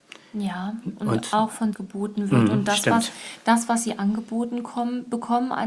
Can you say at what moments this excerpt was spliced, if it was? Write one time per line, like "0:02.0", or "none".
0:01.7